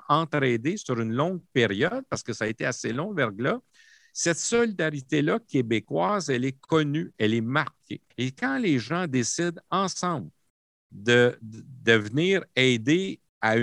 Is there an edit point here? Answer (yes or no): yes